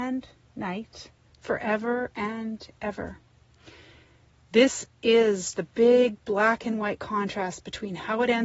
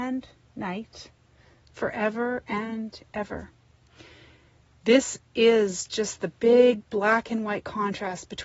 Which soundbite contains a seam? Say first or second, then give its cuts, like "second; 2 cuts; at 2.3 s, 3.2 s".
first; 2 cuts; at 1.3 s, 5.5 s